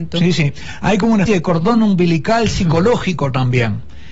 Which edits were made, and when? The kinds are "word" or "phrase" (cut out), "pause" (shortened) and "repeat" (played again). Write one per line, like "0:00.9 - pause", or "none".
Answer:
0:01.3 - word